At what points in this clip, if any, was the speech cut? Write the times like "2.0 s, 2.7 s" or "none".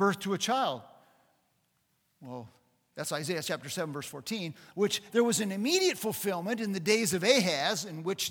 5.1 s